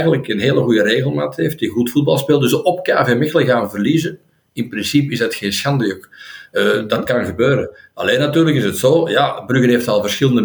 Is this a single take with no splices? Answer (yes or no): yes